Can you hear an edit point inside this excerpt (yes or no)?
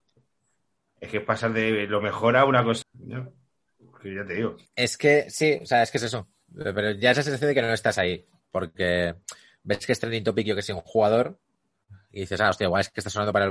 yes